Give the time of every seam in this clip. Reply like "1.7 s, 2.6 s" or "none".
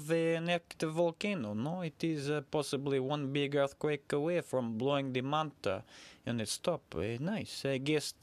none